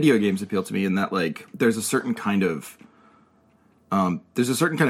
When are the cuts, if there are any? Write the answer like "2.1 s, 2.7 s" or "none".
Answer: 1.5 s